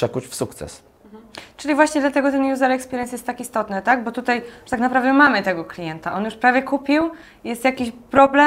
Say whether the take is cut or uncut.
uncut